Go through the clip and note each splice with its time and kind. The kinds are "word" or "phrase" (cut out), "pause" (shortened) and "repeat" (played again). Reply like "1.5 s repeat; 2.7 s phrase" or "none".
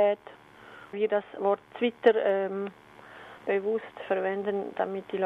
0.9 s word; 3.4 s pause